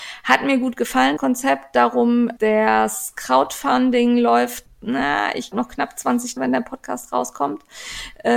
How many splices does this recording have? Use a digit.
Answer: 5